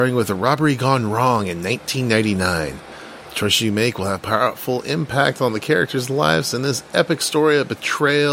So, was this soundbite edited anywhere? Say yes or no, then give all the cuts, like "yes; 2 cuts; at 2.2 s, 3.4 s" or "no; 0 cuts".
no; 0 cuts